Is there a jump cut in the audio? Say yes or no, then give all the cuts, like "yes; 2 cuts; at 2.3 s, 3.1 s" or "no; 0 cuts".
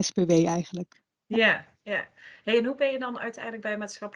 no; 0 cuts